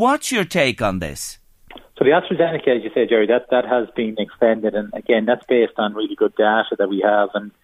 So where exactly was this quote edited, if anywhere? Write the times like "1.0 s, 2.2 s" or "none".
none